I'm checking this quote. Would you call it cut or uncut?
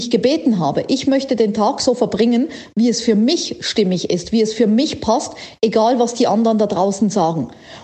uncut